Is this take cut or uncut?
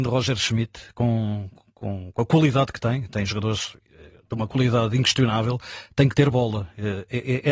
uncut